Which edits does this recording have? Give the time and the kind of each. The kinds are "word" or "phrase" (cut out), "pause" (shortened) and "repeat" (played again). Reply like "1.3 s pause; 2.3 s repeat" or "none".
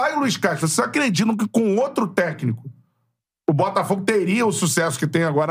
none

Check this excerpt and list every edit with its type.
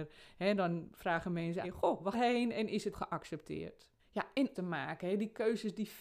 1.6 s word; 2.1 s phrase; 2.9 s word; 4.0 s pause; 4.5 s phrase

